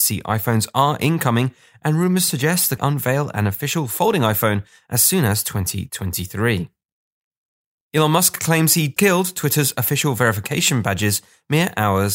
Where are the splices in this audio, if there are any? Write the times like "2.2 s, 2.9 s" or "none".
2.8 s, 9.0 s